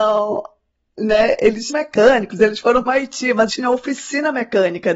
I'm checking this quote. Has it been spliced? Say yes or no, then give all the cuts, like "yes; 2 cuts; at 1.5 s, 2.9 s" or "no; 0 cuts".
yes; 3 cuts; at 1.7 s, 2.9 s, 3.5 s